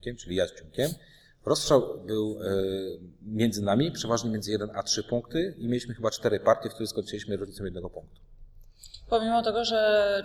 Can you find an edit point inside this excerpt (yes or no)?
no